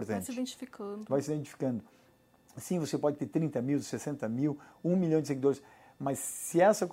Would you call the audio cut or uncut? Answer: uncut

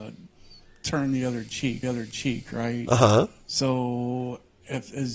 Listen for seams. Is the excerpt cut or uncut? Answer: cut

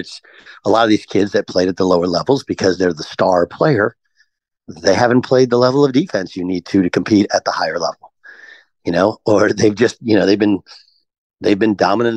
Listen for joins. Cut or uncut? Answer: uncut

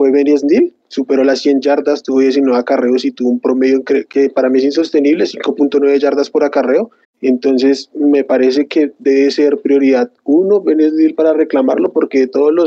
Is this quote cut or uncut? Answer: cut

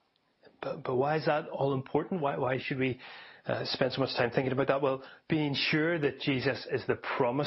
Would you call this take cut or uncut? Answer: uncut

